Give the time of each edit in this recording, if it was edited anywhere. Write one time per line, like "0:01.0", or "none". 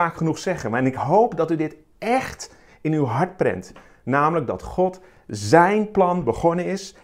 none